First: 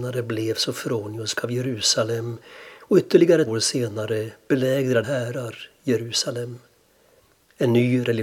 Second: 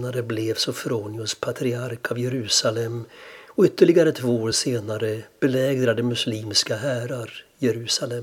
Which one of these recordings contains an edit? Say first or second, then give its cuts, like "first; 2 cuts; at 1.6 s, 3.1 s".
first; 3 cuts; at 1.4 s, 3.5 s, 5.0 s